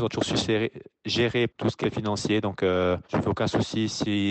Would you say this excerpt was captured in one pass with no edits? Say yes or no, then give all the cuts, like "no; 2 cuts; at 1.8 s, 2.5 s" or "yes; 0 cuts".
no; 3 cuts; at 1.5 s, 1.8 s, 3.0 s